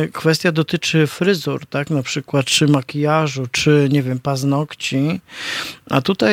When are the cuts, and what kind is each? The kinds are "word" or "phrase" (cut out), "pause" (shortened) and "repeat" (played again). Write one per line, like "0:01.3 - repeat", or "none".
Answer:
none